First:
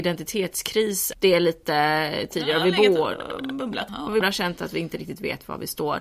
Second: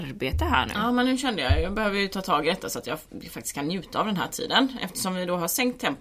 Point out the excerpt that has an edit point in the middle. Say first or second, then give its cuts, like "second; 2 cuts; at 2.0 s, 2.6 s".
first; 3 cuts; at 1.1 s, 3.9 s, 4.2 s